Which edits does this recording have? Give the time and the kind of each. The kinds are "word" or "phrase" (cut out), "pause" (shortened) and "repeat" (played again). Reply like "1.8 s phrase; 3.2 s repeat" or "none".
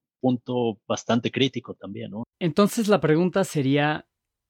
2.3 s pause